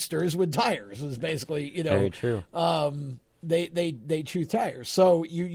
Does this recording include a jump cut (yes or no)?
no